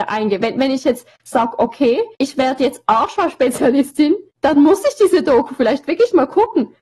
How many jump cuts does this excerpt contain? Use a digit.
2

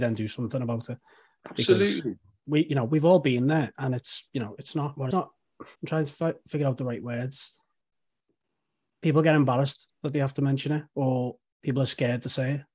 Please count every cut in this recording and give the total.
2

